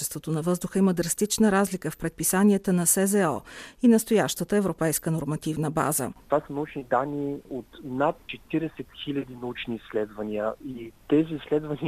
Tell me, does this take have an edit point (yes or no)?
no